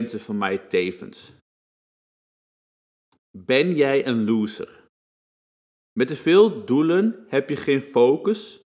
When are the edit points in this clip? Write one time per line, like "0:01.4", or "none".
none